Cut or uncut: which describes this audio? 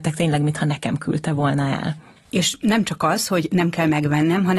uncut